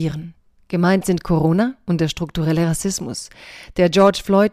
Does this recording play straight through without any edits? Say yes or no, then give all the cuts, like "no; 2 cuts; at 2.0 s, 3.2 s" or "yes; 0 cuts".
yes; 0 cuts